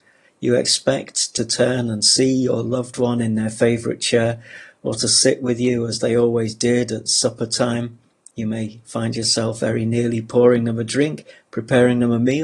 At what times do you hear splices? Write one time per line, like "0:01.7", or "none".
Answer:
none